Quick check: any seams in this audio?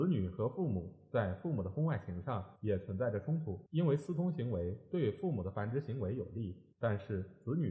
yes; 3 cuts; at 2.6 s, 3.7 s, 6.7 s

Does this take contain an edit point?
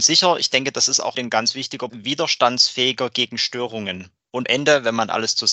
yes; 3 cuts; at 1.1 s, 1.9 s, 4.4 s

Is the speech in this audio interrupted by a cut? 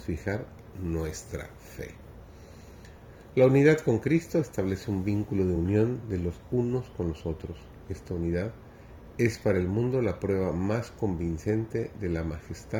no; 0 cuts

